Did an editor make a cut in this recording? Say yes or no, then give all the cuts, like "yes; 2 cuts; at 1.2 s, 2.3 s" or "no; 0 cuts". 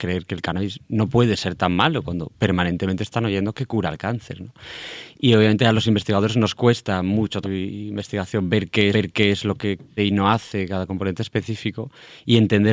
yes; 3 cuts; at 7.4 s, 8.9 s, 10.0 s